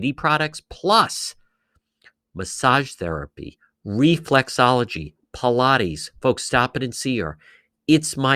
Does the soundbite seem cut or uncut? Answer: uncut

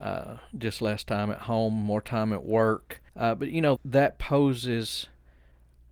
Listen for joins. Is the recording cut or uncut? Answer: cut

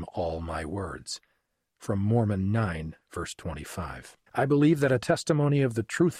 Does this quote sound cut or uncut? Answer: cut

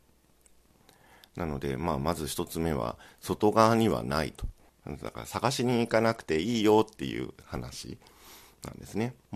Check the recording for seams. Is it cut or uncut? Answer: cut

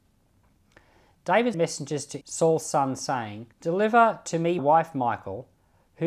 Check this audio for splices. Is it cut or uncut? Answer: cut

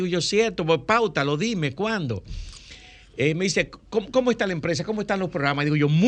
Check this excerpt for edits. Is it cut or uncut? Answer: uncut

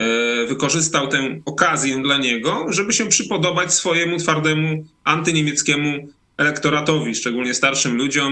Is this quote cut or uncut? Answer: uncut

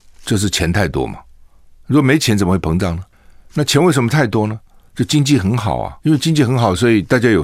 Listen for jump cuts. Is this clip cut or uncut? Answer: cut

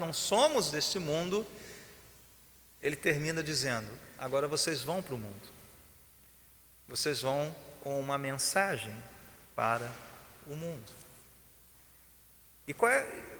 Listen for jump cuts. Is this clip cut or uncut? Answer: uncut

